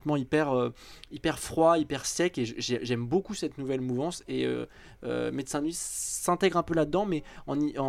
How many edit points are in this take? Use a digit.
0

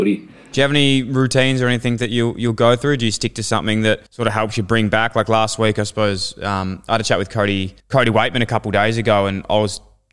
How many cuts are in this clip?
2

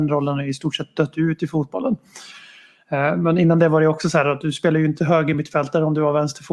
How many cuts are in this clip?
0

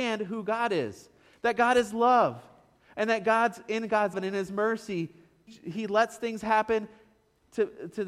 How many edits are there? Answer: 2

